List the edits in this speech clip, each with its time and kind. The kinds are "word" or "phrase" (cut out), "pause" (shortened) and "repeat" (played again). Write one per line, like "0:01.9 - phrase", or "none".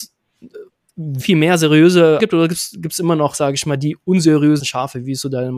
0:01.2 - word
0:02.2 - word
0:04.6 - word